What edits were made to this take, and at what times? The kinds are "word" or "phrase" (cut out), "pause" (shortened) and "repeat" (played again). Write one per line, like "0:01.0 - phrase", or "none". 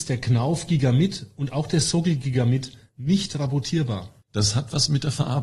none